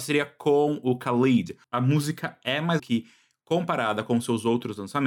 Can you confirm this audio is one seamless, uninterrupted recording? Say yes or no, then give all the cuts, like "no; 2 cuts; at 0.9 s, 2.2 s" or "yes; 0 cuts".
no; 1 cut; at 2.8 s